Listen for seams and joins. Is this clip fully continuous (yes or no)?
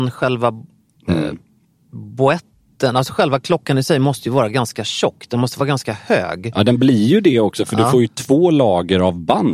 yes